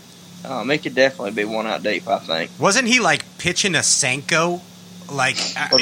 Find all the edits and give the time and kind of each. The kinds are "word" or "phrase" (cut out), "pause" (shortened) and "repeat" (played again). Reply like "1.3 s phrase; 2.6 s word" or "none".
none